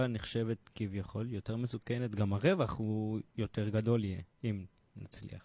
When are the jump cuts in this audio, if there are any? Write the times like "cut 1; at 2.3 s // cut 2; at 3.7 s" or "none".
cut 1; at 3.3 s